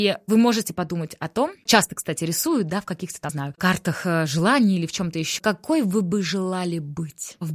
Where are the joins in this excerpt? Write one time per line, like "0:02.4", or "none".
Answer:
0:01.7
0:03.3
0:05.4